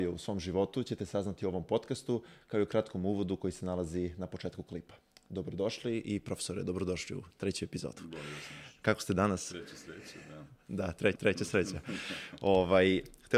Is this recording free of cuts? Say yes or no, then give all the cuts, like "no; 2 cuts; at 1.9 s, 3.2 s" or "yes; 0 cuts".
no; 1 cut; at 11.2 s